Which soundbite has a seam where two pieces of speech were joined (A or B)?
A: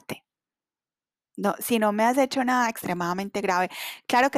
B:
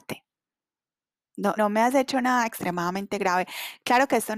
B